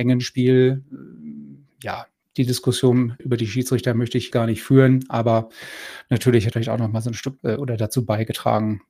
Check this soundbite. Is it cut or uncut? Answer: cut